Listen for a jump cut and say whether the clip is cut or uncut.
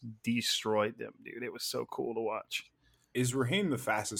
uncut